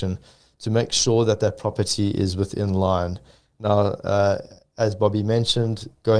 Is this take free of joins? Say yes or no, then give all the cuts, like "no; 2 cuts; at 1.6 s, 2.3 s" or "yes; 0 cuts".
yes; 0 cuts